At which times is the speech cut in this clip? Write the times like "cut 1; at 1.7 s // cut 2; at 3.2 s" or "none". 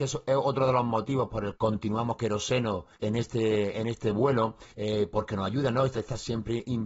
cut 1; at 1.6 s // cut 2; at 2.2 s // cut 3; at 2.9 s // cut 4; at 4.7 s // cut 5; at 5.9 s